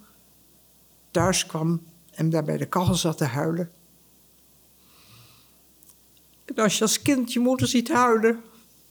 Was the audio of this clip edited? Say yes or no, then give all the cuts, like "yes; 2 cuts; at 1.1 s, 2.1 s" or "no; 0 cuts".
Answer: no; 0 cuts